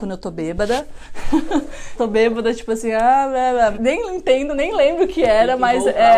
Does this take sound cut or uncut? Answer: cut